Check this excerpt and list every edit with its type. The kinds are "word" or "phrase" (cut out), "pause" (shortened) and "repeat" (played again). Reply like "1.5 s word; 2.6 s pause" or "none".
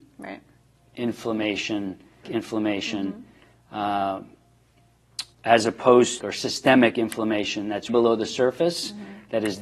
2.2 s word; 5.3 s pause; 6.2 s phrase; 7.9 s word